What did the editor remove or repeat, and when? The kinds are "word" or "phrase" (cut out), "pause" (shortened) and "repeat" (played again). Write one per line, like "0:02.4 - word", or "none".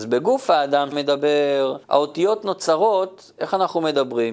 0:00.9 - word
0:01.8 - pause